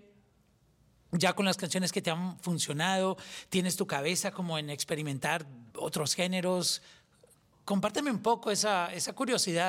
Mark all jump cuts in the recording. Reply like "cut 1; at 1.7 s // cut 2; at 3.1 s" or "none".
cut 1; at 5.7 s